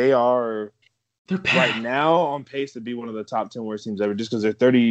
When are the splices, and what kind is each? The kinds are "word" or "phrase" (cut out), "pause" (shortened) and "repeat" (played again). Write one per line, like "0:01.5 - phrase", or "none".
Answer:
none